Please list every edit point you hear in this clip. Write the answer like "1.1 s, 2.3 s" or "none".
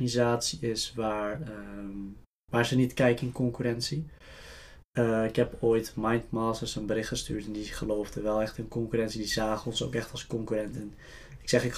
none